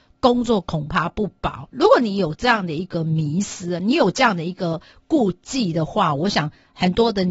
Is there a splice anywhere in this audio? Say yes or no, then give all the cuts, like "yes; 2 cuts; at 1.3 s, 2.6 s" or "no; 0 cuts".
no; 0 cuts